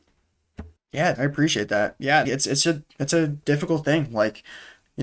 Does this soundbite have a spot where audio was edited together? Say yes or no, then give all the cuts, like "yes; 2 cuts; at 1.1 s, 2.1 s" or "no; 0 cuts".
yes; 2 cuts; at 1.1 s, 2.2 s